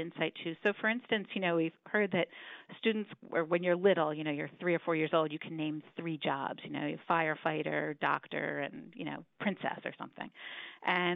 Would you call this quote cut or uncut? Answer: cut